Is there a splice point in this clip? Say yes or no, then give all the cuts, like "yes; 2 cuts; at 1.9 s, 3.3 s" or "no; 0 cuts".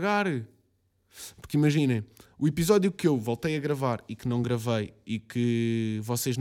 no; 0 cuts